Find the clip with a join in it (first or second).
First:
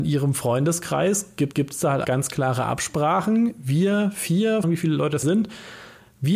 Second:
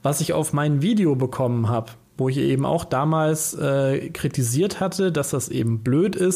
first